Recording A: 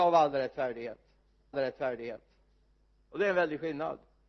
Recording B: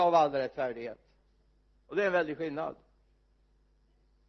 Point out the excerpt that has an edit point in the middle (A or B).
A